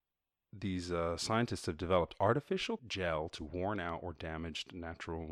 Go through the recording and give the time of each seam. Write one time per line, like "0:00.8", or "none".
0:02.8
0:03.4